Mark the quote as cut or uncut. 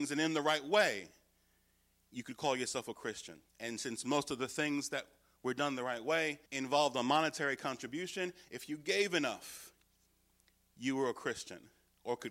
cut